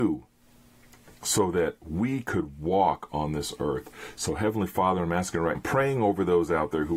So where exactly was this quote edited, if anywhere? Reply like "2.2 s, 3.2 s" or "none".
5.5 s